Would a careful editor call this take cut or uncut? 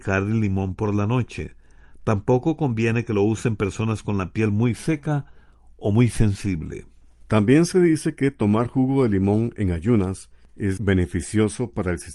cut